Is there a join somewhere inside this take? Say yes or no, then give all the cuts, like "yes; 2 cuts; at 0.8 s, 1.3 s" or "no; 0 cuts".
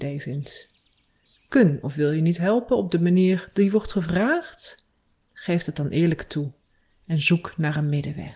no; 0 cuts